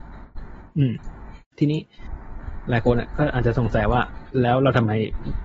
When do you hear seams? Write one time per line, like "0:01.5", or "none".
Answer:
0:01.4